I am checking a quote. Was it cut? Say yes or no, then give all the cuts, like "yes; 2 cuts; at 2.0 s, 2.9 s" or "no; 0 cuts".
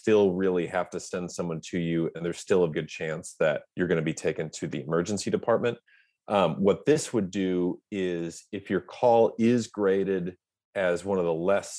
yes; 2 cuts; at 2.7 s, 3.7 s